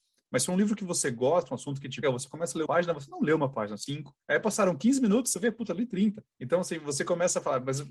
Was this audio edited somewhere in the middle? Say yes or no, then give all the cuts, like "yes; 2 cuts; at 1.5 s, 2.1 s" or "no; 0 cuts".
yes; 5 cuts; at 2.0 s, 2.7 s, 3.9 s, 4.2 s, 6.3 s